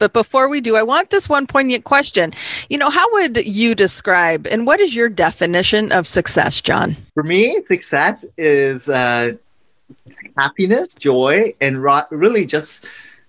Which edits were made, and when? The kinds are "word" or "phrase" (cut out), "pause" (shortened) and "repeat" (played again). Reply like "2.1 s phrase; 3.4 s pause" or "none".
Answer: 7.1 s pause